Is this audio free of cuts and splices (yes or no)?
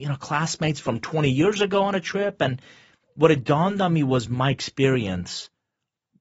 yes